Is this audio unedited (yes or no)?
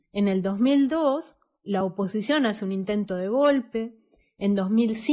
yes